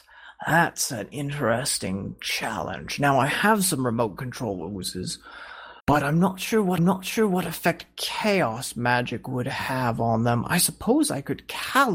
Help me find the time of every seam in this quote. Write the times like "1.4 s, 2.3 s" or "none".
5.8 s, 6.8 s